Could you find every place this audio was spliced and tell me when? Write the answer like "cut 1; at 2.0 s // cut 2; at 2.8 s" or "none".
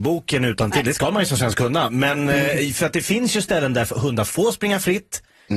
none